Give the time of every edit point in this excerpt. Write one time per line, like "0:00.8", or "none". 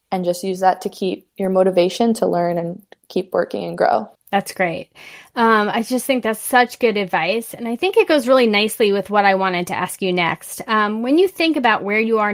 none